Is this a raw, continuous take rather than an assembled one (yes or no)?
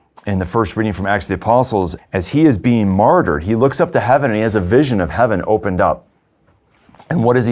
no